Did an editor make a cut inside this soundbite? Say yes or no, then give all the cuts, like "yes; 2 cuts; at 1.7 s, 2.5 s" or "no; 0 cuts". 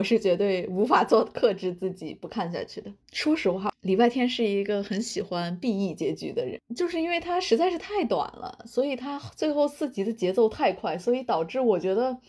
yes; 1 cut; at 3.0 s